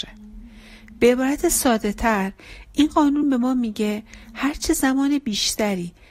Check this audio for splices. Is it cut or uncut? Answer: uncut